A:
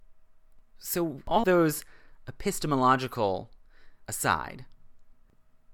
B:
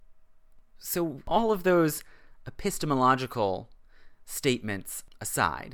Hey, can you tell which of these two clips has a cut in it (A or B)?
A